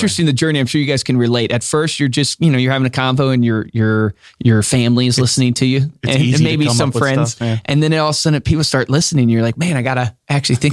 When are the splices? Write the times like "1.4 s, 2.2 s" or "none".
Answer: none